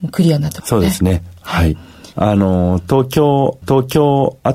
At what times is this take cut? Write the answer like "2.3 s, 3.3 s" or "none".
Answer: 2.1 s, 3.6 s